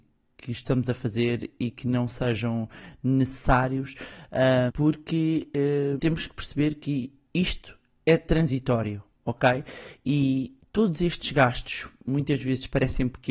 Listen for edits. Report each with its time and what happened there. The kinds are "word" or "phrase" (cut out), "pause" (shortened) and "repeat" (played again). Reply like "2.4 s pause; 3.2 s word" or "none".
4.7 s word; 6.0 s word